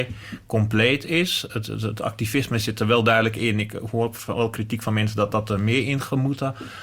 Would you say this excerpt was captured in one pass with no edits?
yes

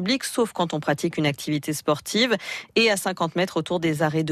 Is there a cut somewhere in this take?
no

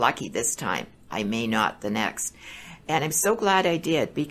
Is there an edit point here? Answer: no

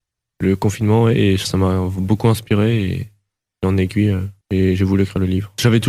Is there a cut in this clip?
no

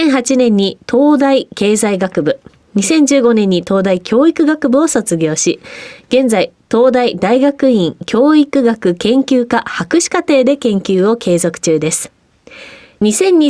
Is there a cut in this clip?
no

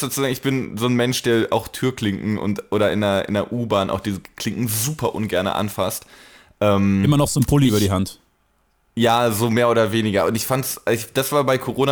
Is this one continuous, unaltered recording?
yes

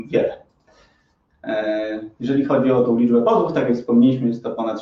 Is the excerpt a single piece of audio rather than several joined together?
yes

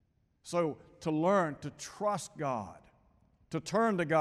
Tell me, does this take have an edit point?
no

